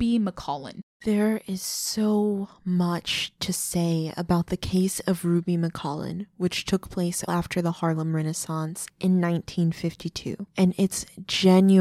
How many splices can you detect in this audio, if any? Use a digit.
1